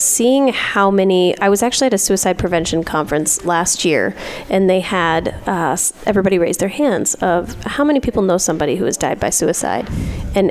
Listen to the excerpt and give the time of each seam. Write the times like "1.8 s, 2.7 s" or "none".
3.4 s